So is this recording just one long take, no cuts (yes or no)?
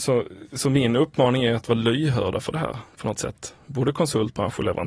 yes